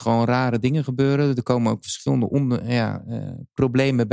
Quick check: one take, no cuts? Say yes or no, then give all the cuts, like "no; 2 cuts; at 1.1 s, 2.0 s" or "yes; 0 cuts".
yes; 0 cuts